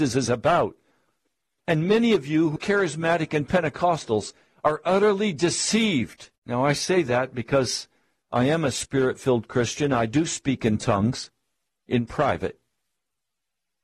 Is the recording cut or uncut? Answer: cut